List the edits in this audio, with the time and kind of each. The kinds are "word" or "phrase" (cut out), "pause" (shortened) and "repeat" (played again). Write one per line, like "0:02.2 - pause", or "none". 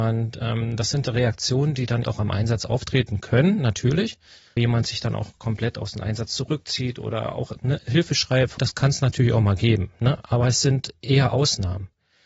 0:02.0 - word
0:04.6 - word
0:08.6 - word

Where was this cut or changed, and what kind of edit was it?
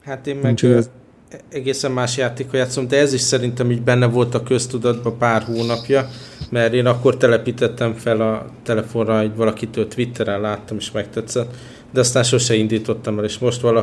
none

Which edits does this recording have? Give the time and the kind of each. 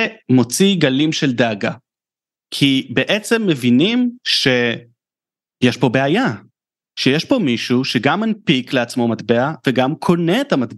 none

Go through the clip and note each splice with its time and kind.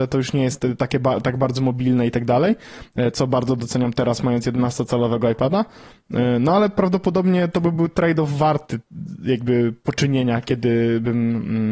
none

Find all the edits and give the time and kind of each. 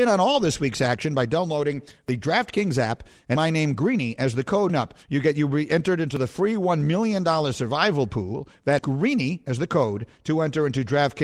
0:03.4 - word
0:04.7 - phrase
0:05.0 - pause
0:08.8 - word

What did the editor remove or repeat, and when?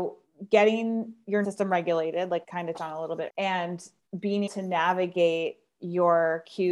0:01.4 - word
0:02.4 - word
0:02.8 - word
0:03.3 - word
0:04.5 - word

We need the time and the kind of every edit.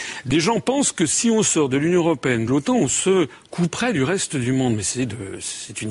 0:02.5 - phrase

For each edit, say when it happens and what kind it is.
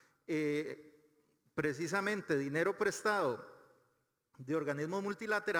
none

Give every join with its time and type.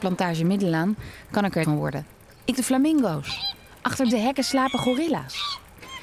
0:01.6 - word
0:02.5 - word
0:04.1 - word

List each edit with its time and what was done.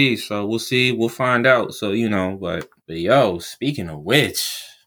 0:02.8 - pause

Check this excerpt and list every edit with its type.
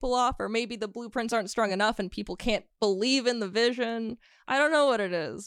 none

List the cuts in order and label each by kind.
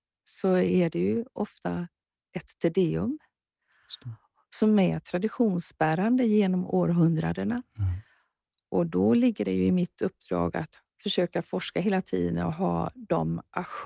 none

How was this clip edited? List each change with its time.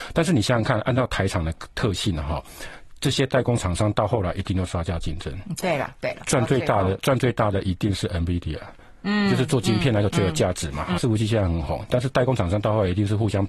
0:11.0 - phrase

